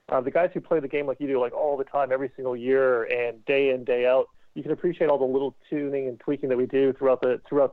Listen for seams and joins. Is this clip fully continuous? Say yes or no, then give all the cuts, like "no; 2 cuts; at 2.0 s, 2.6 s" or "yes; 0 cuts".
yes; 0 cuts